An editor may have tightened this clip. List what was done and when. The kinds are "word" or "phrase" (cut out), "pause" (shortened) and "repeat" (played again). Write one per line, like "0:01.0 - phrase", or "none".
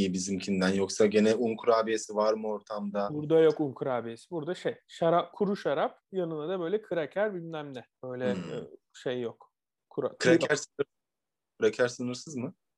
0:05.3 - phrase
0:07.9 - pause
0:10.2 - word